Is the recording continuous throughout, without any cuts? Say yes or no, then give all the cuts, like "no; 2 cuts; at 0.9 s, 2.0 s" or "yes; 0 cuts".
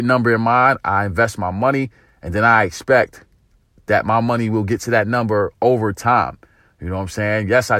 yes; 0 cuts